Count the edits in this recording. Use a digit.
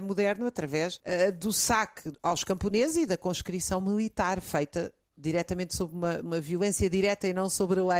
0